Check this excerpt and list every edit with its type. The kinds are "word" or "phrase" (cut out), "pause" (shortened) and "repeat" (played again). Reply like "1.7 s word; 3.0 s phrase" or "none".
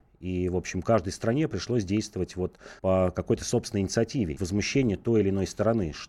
2.8 s pause; 4.4 s phrase